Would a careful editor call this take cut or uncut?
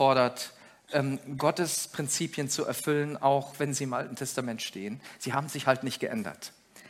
uncut